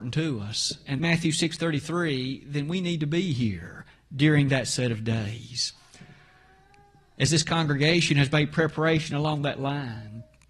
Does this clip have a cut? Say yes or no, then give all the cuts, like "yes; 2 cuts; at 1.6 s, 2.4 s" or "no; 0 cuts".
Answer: yes; 1 cut; at 1.0 s